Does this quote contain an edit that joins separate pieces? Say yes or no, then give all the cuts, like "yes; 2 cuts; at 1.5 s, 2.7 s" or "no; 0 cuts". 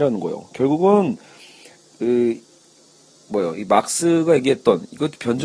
no; 0 cuts